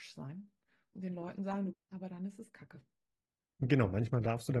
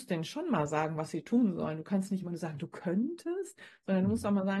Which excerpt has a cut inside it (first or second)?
first